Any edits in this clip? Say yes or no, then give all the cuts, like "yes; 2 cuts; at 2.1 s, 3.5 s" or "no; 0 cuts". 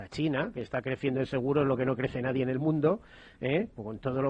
no; 0 cuts